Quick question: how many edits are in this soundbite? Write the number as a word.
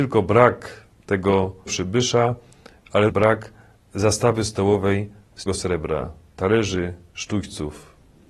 three